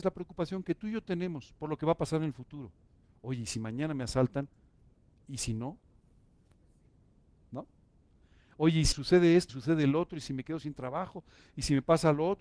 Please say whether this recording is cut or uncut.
cut